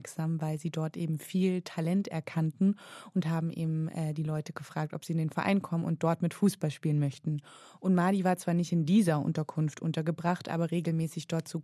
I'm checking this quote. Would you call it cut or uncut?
uncut